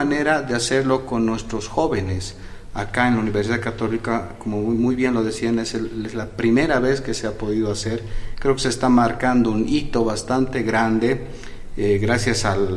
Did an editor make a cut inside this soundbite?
no; 0 cuts

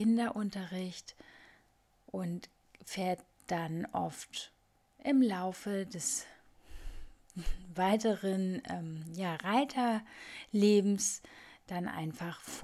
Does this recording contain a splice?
no; 0 cuts

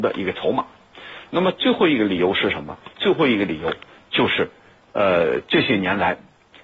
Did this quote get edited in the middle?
no; 0 cuts

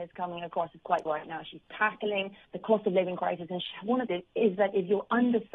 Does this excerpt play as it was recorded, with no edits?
no; 3 cuts; at 1.1 s, 2.4 s, 4.1 s

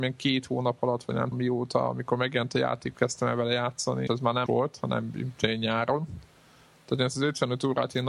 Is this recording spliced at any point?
yes; 4 cuts; at 1.3 s, 2.9 s, 4.1 s, 4.5 s

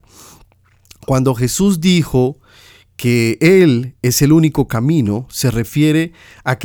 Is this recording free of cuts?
yes; 0 cuts

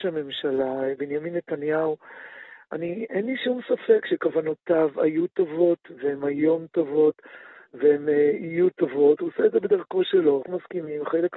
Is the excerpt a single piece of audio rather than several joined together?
no; 1 cut; at 10.4 s

